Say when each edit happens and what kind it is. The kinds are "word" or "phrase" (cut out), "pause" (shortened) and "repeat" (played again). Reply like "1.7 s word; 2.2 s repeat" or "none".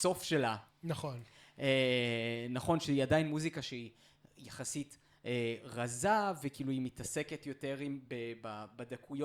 none